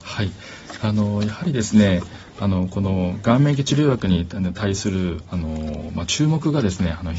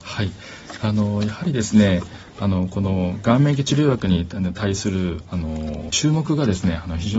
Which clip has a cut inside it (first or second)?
second